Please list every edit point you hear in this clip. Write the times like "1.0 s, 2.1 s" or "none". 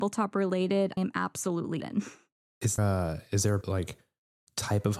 1.0 s, 1.8 s, 2.8 s, 3.6 s